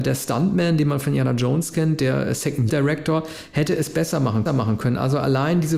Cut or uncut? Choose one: cut